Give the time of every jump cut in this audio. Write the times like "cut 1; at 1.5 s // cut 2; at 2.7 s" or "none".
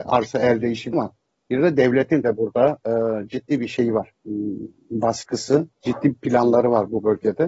cut 1; at 0.9 s // cut 2; at 2.2 s // cut 3; at 5.7 s